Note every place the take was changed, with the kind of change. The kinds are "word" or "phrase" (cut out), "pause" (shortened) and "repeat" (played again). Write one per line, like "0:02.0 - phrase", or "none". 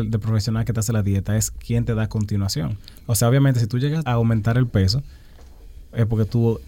0:04.1 - word